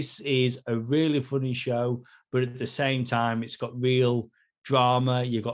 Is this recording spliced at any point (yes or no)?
no